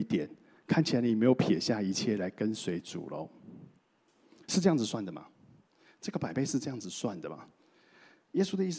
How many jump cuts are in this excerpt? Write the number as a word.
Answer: zero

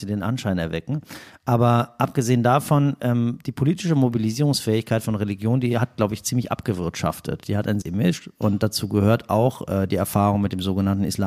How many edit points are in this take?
one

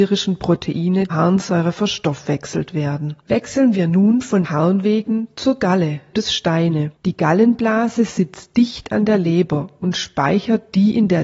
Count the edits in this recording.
five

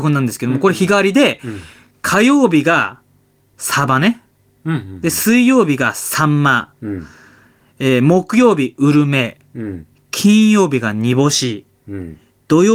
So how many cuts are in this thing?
zero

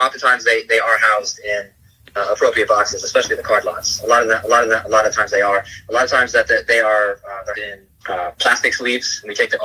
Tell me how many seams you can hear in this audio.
three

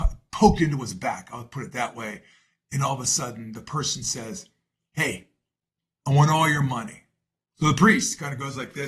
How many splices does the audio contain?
zero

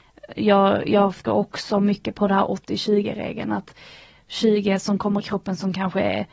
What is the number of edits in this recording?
two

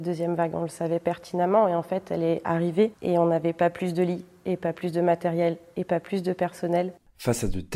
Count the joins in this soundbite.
zero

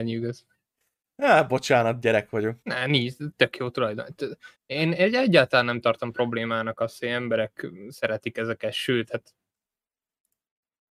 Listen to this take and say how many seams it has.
two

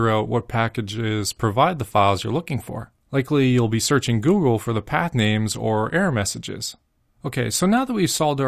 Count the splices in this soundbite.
zero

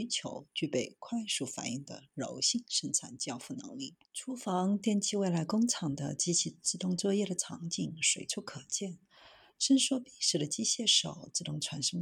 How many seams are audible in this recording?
one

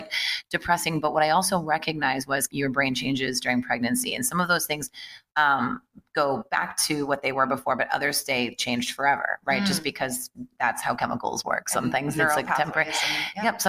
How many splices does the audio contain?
one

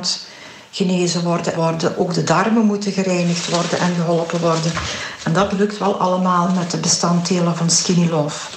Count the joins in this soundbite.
one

